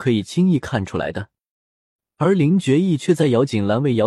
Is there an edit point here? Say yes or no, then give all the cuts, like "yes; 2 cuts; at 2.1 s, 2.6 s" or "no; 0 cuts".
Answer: no; 0 cuts